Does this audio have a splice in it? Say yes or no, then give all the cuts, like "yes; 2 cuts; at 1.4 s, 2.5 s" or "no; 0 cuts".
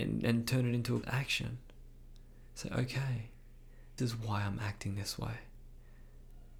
yes; 2 cuts; at 1.0 s, 4.0 s